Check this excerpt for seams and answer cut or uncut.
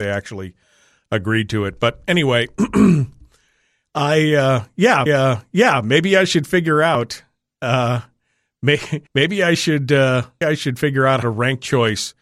cut